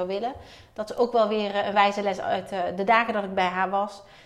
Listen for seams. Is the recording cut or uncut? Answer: uncut